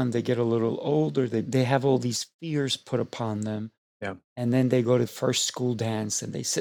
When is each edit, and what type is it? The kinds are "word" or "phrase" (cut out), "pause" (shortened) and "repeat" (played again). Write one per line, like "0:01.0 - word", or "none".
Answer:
0:01.4 - phrase
0:04.2 - pause
0:05.1 - word